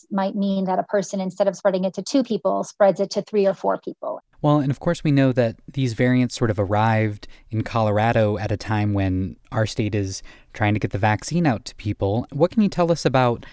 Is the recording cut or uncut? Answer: uncut